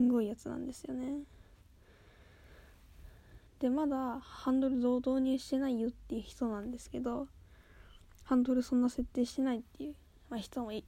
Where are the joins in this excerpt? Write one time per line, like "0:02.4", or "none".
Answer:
0:03.5

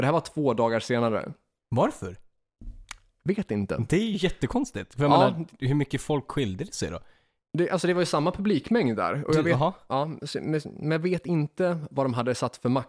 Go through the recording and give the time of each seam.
none

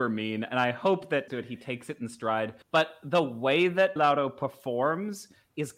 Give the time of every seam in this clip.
0:01.3
0:02.6
0:04.0

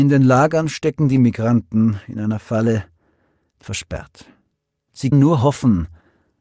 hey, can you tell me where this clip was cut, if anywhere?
0:03.6
0:05.1

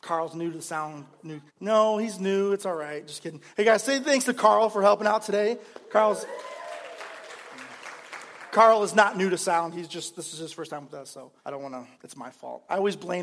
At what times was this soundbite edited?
0:01.5
0:11.4
0:11.9

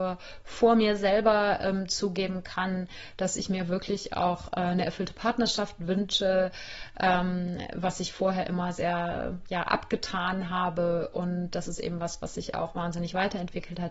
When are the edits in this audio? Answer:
none

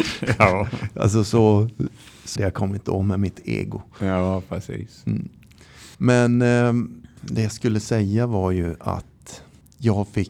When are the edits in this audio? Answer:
0:02.4
0:05.9

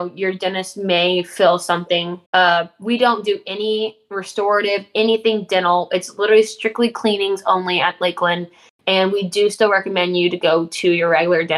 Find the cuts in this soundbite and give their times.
0:02.3

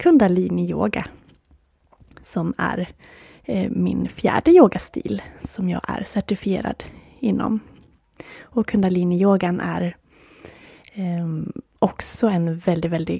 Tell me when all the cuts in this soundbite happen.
none

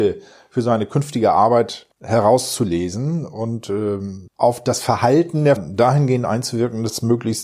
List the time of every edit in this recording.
0:01.9
0:04.3
0:05.6

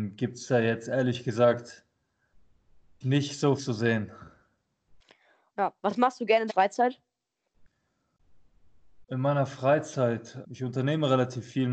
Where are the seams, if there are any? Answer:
0:03.0
0:03.6
0:05.8
0:06.5
0:10.4

